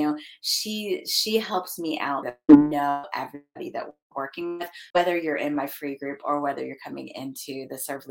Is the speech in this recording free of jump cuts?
no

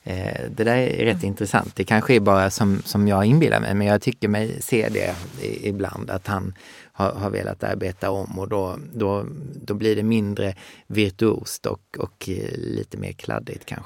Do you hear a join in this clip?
no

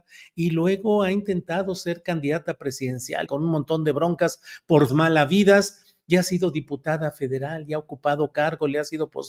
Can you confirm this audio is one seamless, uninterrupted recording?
no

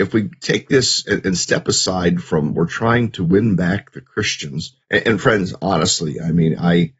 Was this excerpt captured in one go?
no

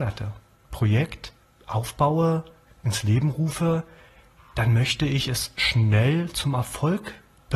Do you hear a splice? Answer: no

